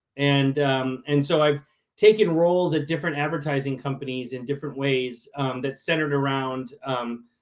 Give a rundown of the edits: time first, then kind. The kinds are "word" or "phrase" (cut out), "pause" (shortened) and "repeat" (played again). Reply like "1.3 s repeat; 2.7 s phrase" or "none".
none